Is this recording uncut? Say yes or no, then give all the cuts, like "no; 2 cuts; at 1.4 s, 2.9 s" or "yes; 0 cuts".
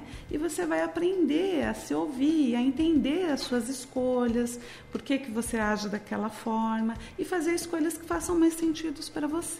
yes; 0 cuts